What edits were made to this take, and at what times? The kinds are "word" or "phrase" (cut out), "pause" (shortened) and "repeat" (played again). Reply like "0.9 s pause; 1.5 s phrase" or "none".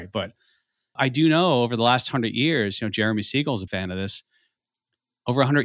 1.0 s word; 3.7 s word